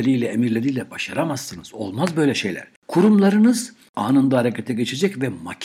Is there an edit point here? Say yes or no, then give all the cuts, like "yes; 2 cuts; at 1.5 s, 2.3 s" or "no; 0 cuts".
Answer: no; 0 cuts